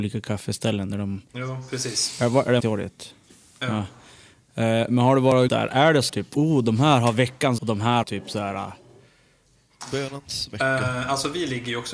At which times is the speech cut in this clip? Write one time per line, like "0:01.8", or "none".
0:01.3
0:02.6
0:05.5
0:06.1
0:07.6
0:08.0